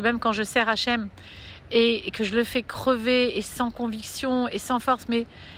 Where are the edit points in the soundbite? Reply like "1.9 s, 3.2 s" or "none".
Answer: none